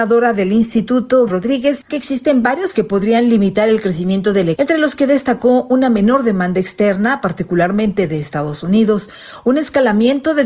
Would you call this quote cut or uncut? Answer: cut